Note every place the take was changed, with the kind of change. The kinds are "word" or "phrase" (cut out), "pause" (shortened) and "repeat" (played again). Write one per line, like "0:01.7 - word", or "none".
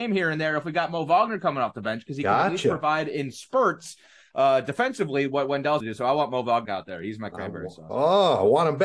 0:05.8 - word
0:06.7 - word